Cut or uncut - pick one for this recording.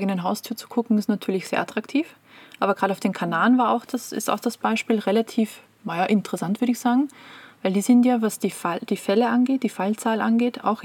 uncut